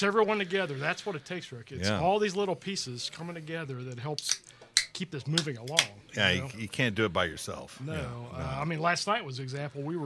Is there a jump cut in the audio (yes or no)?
no